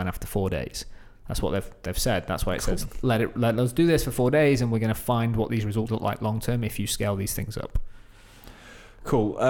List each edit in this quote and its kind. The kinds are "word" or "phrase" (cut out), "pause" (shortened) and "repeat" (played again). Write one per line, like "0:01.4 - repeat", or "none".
0:05.9 - word